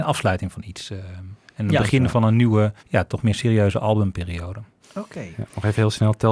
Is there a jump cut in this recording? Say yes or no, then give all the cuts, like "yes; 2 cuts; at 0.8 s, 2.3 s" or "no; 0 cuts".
yes; 1 cut; at 2.8 s